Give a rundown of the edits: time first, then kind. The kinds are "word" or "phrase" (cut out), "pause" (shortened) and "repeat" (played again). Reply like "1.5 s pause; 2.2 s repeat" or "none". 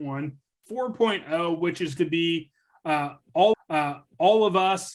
2.0 s word; 3.5 s repeat